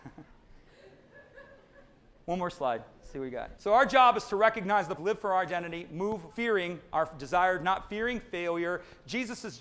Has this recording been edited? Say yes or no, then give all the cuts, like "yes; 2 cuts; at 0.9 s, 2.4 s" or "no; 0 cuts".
yes; 3 cuts; at 3.6 s, 5.0 s, 6.3 s